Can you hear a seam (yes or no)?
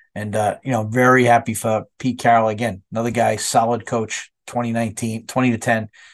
no